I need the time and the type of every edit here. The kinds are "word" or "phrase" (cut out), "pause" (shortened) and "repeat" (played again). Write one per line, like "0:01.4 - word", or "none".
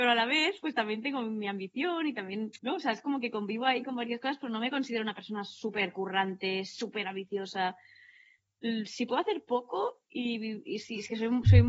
0:02.6 - pause